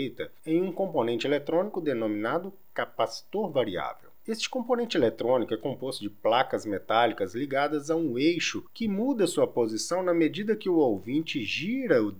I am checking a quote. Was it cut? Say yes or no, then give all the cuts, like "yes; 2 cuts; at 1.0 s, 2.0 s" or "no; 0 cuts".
no; 0 cuts